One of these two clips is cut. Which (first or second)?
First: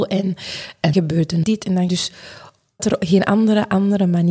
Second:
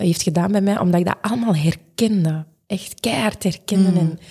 first